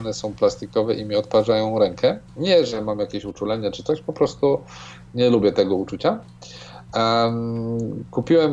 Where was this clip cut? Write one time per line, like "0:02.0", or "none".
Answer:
0:02.3